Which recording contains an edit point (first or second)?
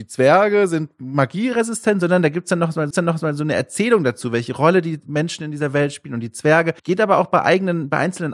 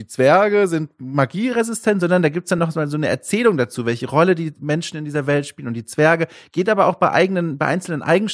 first